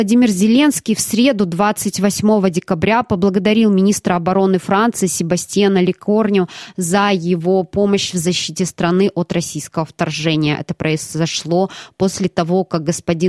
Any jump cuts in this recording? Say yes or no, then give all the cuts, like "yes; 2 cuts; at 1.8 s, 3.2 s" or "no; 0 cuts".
no; 0 cuts